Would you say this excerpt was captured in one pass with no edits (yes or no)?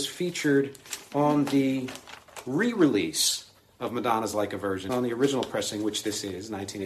no